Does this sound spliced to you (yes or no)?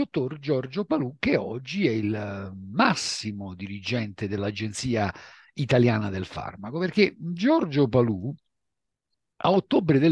no